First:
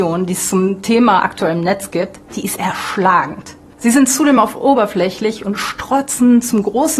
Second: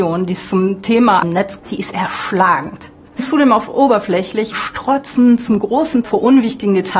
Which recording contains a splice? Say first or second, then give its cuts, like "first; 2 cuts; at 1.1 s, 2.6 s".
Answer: second; 5 cuts; at 1.2 s, 1.6 s, 3.2 s, 4.5 s, 6.0 s